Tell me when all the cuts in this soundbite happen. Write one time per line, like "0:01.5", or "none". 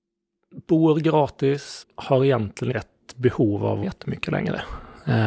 0:01.8
0:02.7
0:03.8